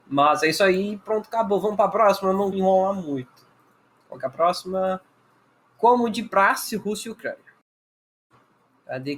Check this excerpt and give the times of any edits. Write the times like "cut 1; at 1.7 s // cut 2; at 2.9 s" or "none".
cut 1; at 2.5 s